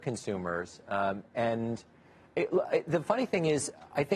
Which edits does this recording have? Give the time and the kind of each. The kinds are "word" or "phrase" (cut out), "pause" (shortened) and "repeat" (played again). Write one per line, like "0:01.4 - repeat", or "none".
none